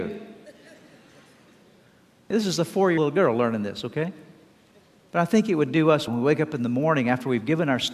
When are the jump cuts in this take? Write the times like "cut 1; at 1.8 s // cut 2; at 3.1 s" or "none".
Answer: cut 1; at 2.3 s // cut 2; at 3.0 s // cut 3; at 6.1 s